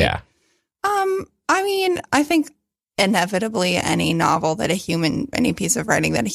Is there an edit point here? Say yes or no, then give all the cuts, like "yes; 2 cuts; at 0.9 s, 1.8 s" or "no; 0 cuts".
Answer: no; 0 cuts